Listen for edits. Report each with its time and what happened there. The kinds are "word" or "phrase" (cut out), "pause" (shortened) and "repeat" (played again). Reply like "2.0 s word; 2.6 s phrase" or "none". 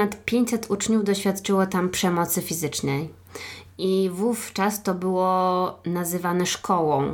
none